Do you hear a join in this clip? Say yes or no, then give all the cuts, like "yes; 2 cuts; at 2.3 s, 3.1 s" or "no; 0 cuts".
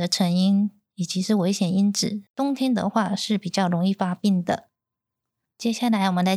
yes; 1 cut; at 2.3 s